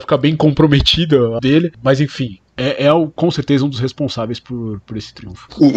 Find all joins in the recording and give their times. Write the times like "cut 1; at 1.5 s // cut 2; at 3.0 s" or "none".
cut 1; at 1.4 s